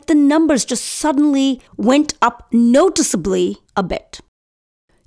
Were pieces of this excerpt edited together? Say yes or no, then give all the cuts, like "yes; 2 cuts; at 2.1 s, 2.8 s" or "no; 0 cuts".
yes; 2 cuts; at 1.7 s, 3.7 s